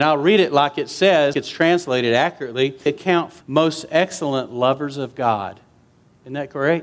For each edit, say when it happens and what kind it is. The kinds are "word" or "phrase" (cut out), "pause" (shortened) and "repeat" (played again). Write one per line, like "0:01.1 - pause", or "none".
0:01.3 - word
0:02.9 - phrase
0:03.4 - word